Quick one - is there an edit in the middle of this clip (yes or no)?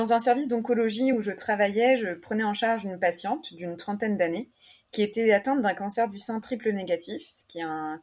no